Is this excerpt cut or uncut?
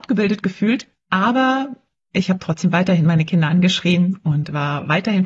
cut